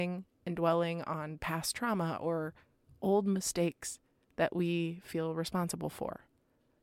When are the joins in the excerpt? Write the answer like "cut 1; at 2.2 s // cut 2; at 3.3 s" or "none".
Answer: none